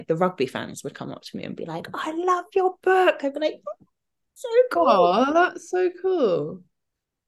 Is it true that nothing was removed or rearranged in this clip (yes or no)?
yes